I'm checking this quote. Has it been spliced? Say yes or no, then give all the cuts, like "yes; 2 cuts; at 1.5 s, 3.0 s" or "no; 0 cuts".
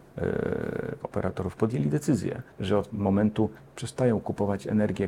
yes; 4 cuts; at 1.0 s, 1.6 s, 2.5 s, 2.9 s